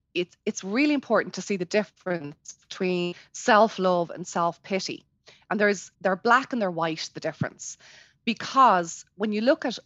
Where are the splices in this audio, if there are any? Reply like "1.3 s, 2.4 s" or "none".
5.9 s